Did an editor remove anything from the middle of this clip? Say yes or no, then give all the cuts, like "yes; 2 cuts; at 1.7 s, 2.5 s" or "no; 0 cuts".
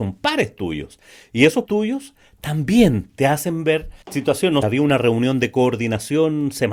yes; 3 cuts; at 1.7 s, 4.0 s, 4.6 s